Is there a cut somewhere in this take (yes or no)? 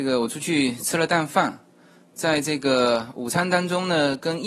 no